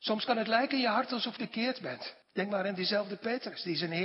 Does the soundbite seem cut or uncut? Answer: cut